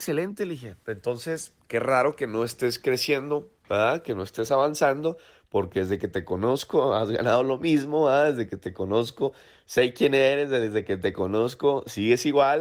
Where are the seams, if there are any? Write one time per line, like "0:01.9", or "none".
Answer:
none